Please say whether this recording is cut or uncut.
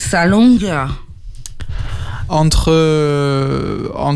cut